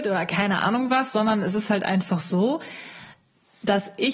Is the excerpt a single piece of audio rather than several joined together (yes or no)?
yes